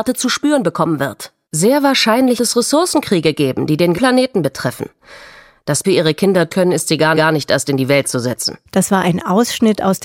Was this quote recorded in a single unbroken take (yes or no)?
no